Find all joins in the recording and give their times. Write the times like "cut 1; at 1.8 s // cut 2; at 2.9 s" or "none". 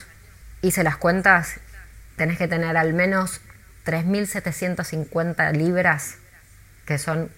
none